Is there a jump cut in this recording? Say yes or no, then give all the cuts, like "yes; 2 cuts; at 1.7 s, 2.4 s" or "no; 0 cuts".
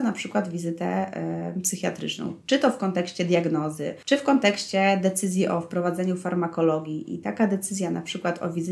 no; 0 cuts